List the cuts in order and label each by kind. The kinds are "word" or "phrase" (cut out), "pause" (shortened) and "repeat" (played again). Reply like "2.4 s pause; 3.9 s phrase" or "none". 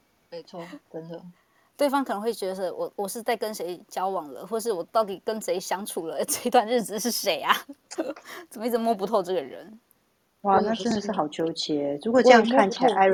none